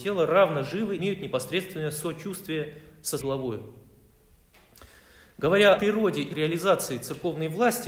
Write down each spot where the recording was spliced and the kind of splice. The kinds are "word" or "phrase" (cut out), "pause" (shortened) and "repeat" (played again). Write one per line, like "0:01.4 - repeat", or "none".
0:01.0 - word
0:03.2 - word
0:05.8 - word
0:06.3 - word